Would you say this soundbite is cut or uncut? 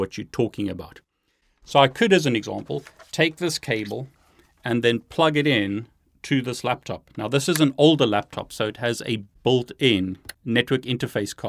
uncut